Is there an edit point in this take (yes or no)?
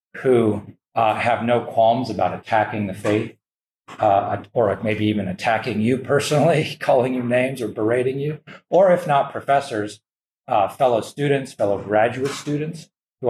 no